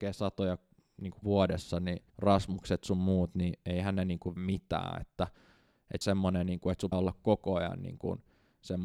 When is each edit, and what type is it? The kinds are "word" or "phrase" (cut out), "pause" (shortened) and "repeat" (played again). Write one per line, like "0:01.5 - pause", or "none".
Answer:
0:01.2 - word
0:02.1 - pause
0:04.4 - word
0:06.0 - phrase
0:06.9 - word